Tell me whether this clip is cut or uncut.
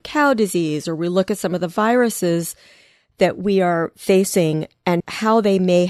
uncut